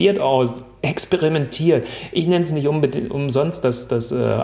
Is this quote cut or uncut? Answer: uncut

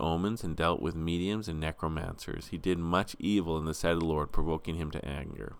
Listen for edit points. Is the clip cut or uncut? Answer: uncut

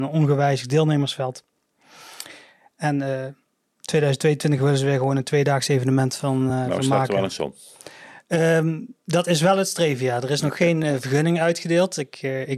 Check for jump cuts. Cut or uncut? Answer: uncut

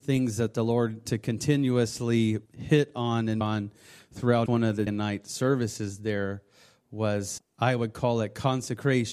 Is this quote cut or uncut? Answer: cut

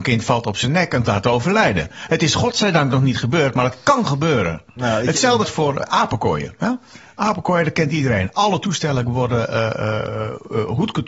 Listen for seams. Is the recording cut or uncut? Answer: cut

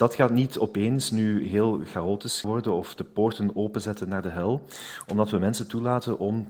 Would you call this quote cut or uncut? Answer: cut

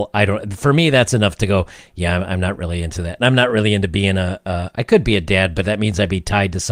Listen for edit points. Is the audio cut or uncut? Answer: uncut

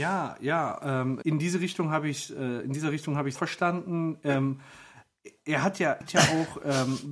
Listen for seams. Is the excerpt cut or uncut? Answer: cut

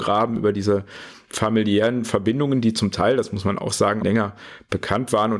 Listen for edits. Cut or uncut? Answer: cut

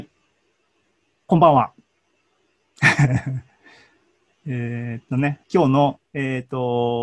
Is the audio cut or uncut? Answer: cut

